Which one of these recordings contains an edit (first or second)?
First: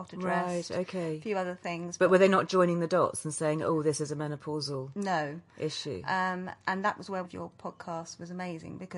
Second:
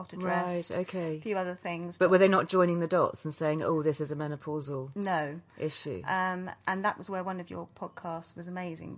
first